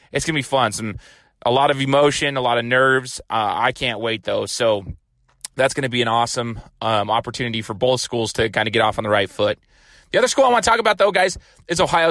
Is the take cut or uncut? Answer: uncut